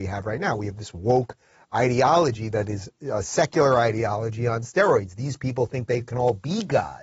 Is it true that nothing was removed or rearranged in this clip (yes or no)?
yes